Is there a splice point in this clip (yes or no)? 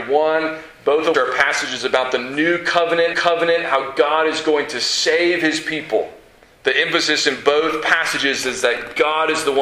yes